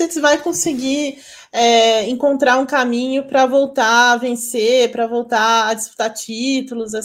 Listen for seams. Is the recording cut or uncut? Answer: uncut